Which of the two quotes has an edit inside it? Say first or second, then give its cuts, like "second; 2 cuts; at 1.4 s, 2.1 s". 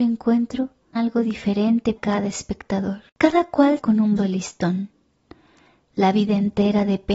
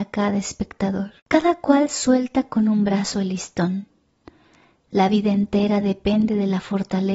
first; 4 cuts; at 1.0 s, 2.0 s, 3.8 s, 4.2 s